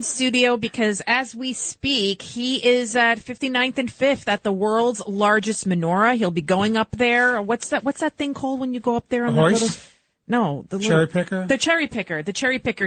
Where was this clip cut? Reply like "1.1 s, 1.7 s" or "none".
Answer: none